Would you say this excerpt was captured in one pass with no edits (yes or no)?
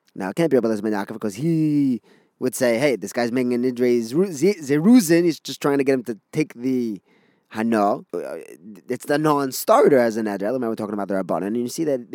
yes